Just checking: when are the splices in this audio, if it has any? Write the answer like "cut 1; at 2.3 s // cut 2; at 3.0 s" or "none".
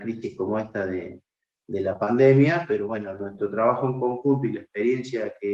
none